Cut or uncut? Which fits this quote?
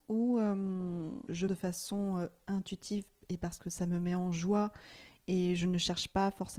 cut